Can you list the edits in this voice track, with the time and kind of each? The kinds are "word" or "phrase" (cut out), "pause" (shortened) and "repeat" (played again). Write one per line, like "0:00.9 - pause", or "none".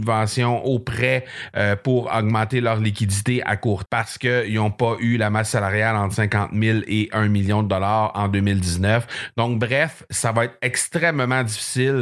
0:03.9 - word